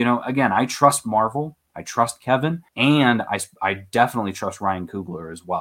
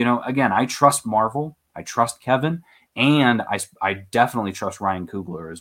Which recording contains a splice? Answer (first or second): first